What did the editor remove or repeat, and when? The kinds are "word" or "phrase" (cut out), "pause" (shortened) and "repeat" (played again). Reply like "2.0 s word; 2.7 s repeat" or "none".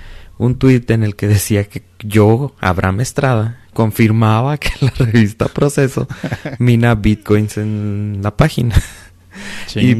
none